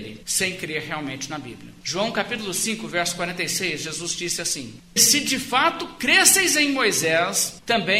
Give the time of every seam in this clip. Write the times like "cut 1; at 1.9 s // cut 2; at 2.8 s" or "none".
cut 1; at 5.0 s